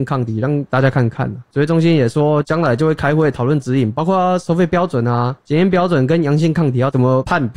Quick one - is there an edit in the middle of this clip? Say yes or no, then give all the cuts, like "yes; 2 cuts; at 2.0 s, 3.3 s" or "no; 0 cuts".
no; 0 cuts